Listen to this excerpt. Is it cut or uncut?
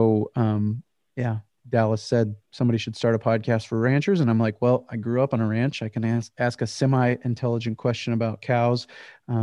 uncut